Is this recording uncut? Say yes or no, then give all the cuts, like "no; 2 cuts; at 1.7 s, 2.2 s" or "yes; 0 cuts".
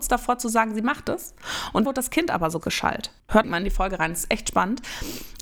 no; 3 cuts; at 1.8 s, 2.6 s, 3.4 s